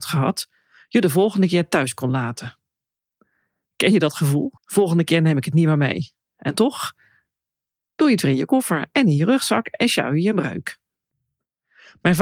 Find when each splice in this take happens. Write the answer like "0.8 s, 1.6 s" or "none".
4.6 s